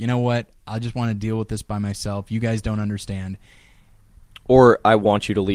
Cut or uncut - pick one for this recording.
uncut